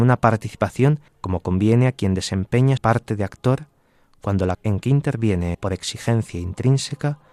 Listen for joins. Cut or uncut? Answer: cut